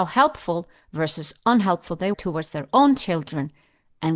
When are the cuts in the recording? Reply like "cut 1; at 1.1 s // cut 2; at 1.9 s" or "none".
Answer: cut 1; at 2.1 s